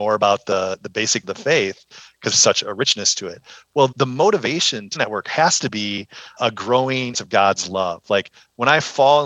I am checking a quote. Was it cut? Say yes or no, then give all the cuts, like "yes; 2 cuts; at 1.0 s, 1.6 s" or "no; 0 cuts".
yes; 6 cuts; at 1.2 s, 2.3 s, 3.9 s, 5.0 s, 6.4 s, 7.1 s